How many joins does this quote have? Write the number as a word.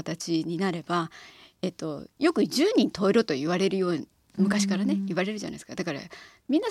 zero